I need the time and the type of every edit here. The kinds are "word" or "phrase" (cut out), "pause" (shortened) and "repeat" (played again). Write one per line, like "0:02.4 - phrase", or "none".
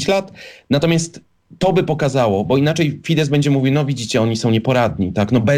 none